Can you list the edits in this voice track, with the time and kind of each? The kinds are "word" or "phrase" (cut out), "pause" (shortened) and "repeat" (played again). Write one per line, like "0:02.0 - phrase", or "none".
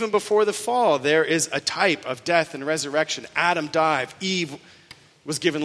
none

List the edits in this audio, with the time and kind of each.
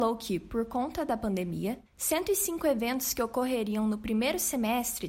0:01.9 - pause

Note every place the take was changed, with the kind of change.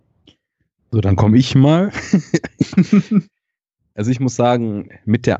none

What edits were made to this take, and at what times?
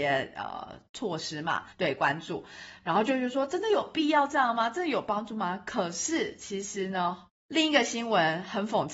0:01.7 - pause
0:07.3 - pause

